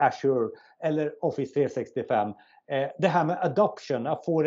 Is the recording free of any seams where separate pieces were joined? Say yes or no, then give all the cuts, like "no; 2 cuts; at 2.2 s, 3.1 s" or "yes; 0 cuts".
yes; 0 cuts